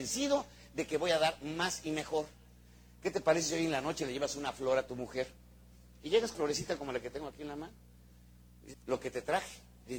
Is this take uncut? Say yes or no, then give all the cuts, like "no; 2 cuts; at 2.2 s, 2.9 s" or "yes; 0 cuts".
no; 2 cuts; at 6.3 s, 8.7 s